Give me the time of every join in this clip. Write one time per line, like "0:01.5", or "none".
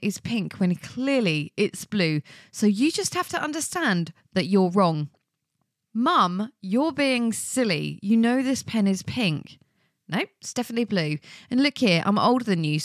none

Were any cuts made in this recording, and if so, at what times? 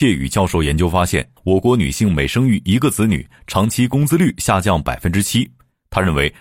0:01.4

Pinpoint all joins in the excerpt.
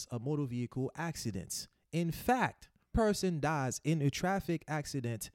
0:02.9

